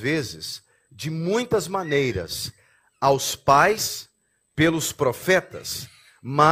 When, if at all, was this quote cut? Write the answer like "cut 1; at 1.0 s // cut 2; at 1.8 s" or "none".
none